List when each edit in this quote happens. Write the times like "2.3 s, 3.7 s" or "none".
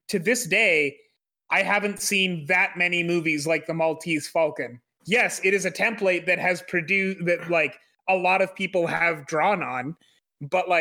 none